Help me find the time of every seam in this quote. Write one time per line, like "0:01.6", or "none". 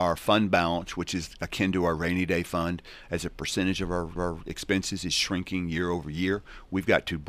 0:04.2